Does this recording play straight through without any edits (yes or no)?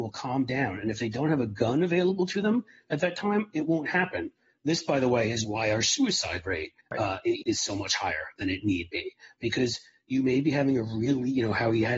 no